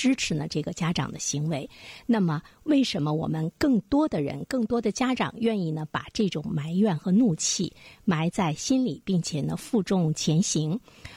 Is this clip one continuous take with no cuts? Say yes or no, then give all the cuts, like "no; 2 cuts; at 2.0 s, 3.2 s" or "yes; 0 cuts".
yes; 0 cuts